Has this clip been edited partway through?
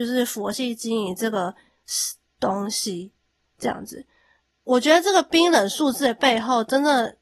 no; 0 cuts

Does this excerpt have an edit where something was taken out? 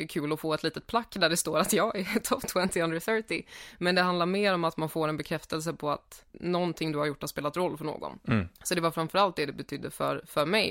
yes; 2 cuts; at 6.3 s, 8.6 s

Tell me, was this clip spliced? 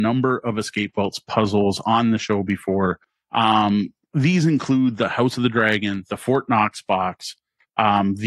no; 0 cuts

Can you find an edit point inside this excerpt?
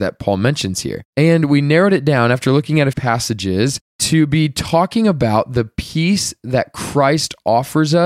yes; 2 cuts; at 1.1 s, 2.9 s

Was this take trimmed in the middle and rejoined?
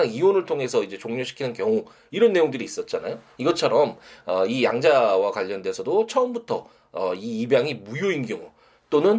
no; 0 cuts

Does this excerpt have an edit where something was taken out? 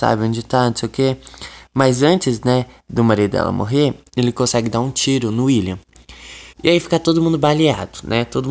yes; 1 cut; at 6.5 s

